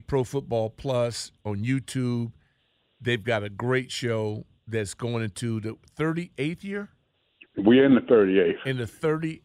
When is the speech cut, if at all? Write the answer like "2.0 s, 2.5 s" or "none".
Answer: none